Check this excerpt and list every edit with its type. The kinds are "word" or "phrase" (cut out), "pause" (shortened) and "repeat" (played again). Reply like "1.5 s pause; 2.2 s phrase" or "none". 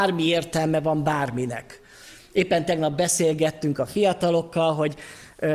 none